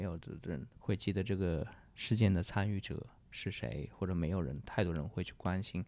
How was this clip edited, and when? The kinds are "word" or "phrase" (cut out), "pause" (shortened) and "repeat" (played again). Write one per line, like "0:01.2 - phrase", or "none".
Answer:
none